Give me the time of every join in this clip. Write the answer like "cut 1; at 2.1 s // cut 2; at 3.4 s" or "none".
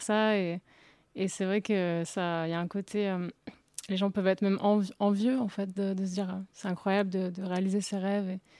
none

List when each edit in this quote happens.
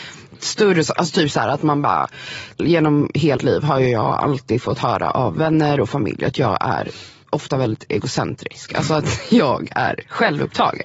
cut 1; at 2.6 s // cut 2; at 3.4 s // cut 3; at 7.2 s

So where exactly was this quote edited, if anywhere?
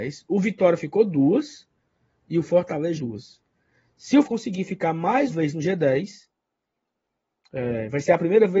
cut 1; at 3.0 s // cut 2; at 4.2 s // cut 3; at 5.3 s

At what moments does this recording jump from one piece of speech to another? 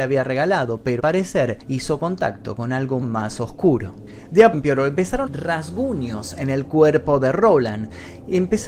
cut 1; at 1.0 s // cut 2; at 1.6 s // cut 3; at 3.0 s // cut 4; at 4.5 s // cut 5; at 5.3 s

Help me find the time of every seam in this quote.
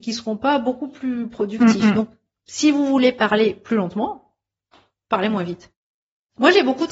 none

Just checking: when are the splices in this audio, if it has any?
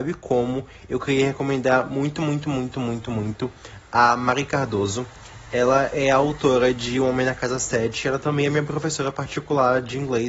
none

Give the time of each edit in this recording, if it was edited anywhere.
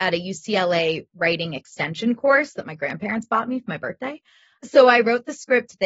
none

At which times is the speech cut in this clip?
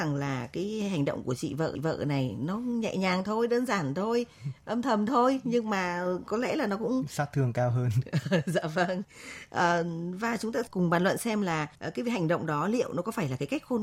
cut 1; at 1.7 s // cut 2; at 11.7 s

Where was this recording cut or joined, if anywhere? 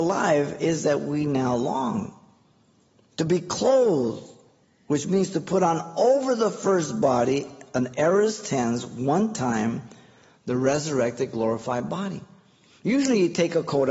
none

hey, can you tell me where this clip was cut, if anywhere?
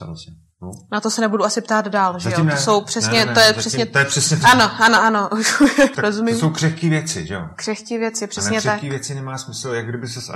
cut 1; at 4.4 s // cut 2; at 5.9 s

